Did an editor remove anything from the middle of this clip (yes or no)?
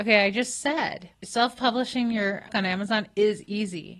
yes